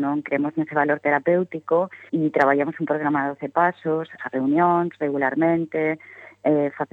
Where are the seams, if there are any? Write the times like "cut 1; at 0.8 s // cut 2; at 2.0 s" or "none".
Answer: cut 1; at 2.1 s // cut 2; at 4.2 s